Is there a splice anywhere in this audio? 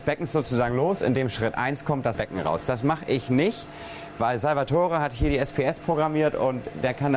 yes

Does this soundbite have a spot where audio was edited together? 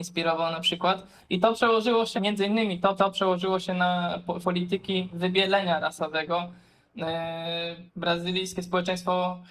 yes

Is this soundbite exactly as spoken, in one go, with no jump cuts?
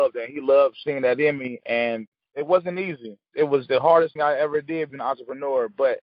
no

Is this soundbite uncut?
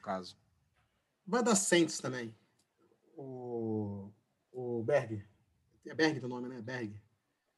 yes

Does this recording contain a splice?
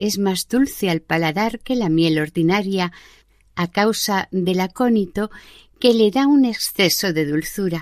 no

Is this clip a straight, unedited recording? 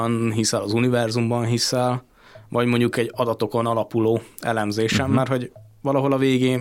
yes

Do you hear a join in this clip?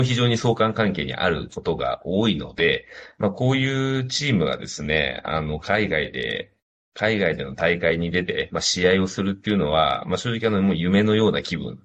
no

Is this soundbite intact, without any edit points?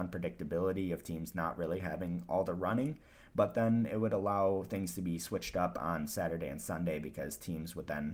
yes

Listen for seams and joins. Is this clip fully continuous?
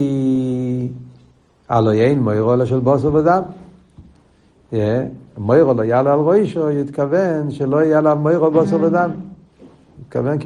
yes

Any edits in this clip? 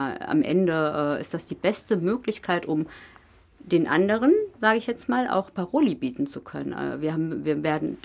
no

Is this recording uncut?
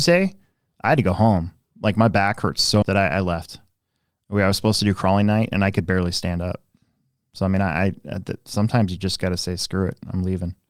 no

